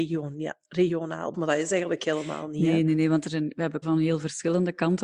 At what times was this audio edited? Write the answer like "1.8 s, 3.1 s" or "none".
1.3 s, 3.8 s